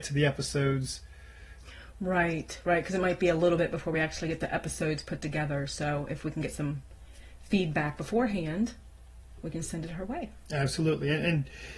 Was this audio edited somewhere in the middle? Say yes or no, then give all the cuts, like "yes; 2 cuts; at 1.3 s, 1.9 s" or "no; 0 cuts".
no; 0 cuts